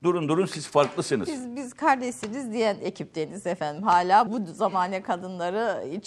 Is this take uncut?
no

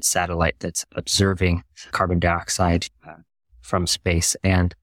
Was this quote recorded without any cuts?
yes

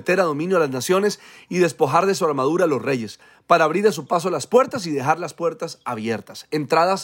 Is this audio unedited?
yes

